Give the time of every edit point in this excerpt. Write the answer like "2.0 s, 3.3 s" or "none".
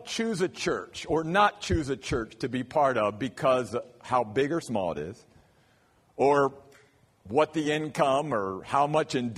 none